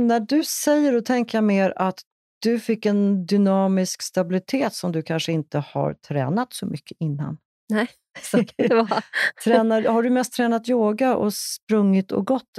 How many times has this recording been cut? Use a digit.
0